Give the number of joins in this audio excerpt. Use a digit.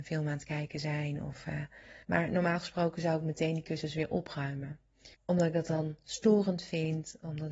2